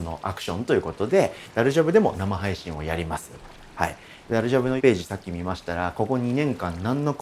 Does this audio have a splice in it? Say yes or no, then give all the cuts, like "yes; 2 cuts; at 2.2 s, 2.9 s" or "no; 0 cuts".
yes; 1 cut; at 4.8 s